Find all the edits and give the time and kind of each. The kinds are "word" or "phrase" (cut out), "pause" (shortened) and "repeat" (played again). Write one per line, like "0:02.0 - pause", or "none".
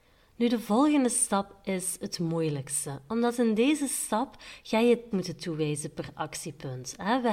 0:05.1 - word